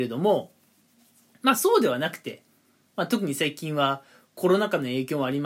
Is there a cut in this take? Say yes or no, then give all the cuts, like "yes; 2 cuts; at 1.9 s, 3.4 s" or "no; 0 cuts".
no; 0 cuts